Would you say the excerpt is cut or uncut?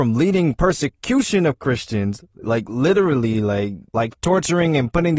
cut